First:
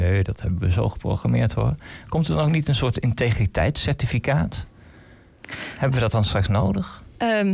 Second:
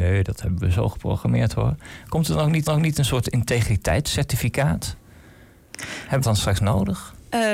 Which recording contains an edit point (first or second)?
second